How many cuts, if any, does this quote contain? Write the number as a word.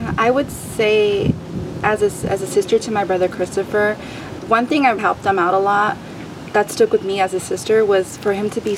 two